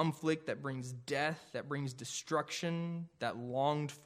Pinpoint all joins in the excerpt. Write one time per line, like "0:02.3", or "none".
none